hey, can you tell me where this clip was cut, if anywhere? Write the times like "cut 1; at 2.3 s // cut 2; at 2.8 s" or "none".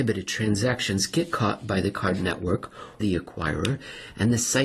cut 1; at 3.0 s